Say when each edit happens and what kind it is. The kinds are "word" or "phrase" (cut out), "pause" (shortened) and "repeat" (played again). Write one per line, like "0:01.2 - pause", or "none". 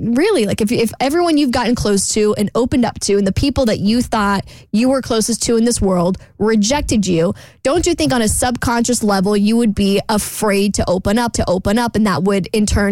0:11.3 - repeat